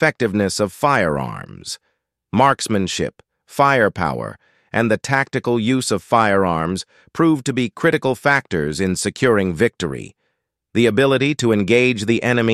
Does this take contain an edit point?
no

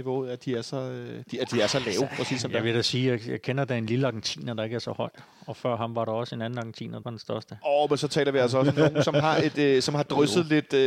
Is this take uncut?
no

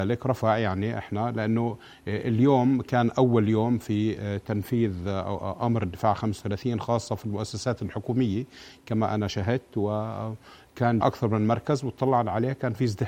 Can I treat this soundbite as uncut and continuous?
no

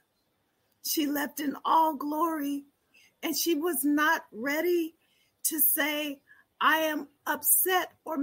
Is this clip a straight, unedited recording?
yes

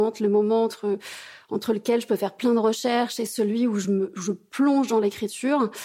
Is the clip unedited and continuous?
yes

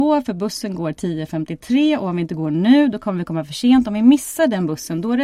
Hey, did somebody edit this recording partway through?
no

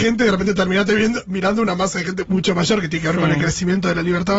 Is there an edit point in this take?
yes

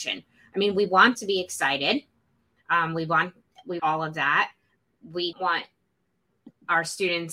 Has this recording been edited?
yes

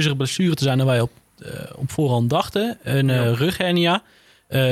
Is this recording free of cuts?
yes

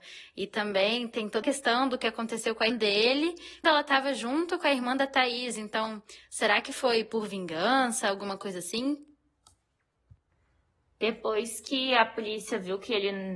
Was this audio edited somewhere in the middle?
yes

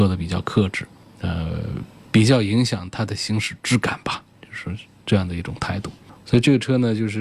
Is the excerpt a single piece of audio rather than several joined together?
yes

